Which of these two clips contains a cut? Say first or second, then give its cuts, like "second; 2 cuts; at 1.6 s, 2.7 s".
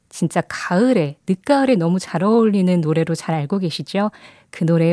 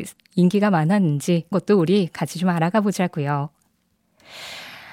second; 1 cut; at 1.5 s